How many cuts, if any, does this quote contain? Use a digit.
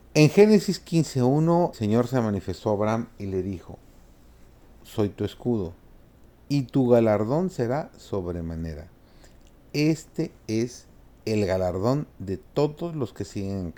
3